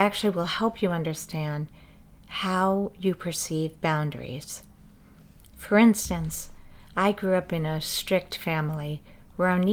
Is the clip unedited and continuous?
yes; 0 cuts

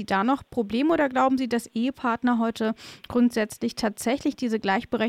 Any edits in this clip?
no; 0 cuts

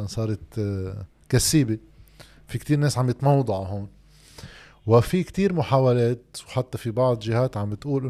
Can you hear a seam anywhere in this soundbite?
no; 0 cuts

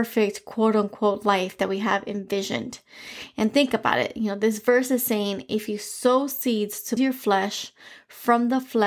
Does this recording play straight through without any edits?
no; 1 cut; at 7.0 s

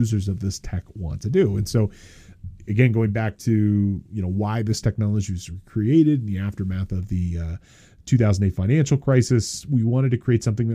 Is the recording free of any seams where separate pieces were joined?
yes; 0 cuts

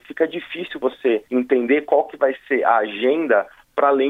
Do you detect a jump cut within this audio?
yes; 1 cut; at 1.3 s

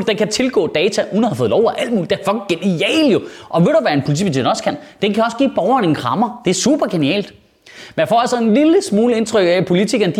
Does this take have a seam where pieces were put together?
no; 0 cuts

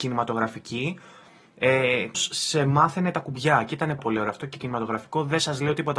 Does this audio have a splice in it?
yes; 2 cuts; at 2.1 s, 4.0 s

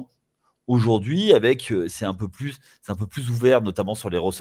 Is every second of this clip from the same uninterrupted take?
yes; 0 cuts

